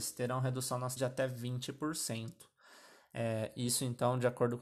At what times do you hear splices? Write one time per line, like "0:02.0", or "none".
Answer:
0:01.0